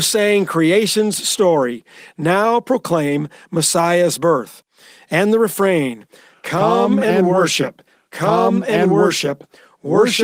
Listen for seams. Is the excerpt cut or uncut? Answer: uncut